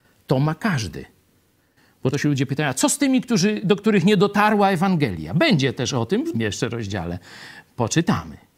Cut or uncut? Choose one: cut